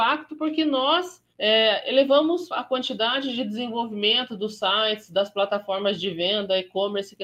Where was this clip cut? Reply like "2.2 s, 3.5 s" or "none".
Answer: 1.3 s, 2.5 s